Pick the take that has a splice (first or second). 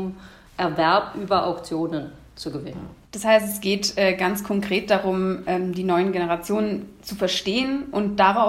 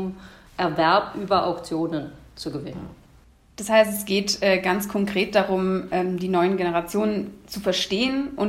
first